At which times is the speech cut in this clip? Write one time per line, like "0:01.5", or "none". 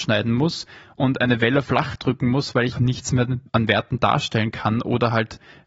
0:01.6
0:02.7
0:03.5